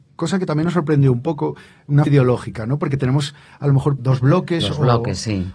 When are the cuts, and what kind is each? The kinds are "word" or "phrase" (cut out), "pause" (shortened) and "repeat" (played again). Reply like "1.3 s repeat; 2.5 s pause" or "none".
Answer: 2.1 s word; 4.0 s word